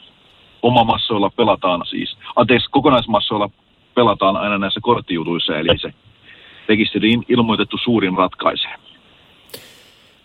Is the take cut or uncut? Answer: cut